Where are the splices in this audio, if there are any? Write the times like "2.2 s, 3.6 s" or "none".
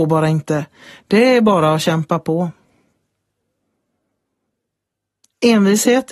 none